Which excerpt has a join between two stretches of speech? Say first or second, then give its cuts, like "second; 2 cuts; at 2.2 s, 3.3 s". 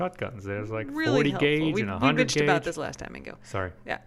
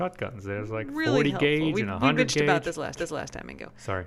second; 1 cut; at 3.0 s